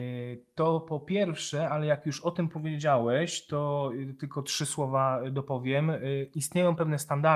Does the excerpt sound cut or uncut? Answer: uncut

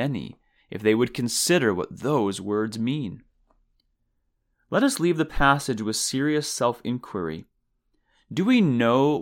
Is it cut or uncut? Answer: uncut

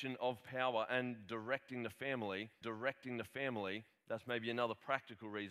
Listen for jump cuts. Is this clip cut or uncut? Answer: cut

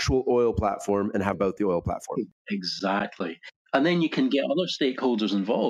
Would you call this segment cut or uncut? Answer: cut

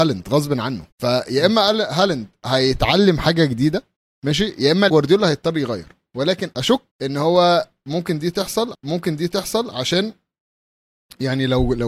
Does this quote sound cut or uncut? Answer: cut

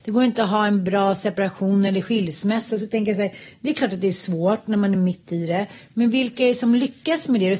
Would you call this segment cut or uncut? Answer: uncut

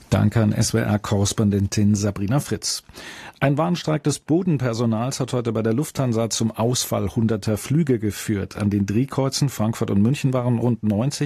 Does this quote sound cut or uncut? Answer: uncut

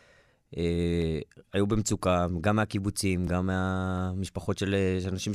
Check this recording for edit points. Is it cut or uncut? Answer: cut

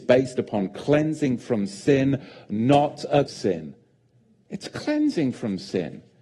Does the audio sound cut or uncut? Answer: cut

